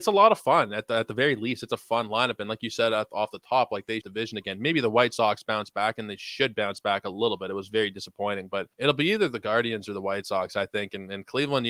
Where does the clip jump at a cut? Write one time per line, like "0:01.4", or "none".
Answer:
0:04.0
0:08.7